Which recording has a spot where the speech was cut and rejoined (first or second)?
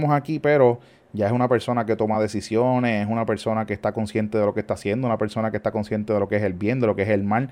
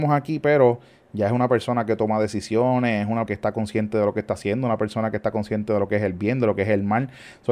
second